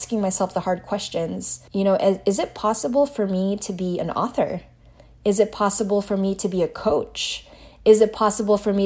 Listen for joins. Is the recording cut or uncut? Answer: cut